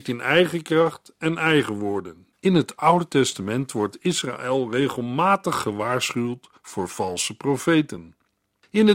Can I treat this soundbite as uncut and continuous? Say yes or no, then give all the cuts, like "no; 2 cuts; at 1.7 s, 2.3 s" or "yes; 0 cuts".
no; 2 cuts; at 2.4 s, 6.6 s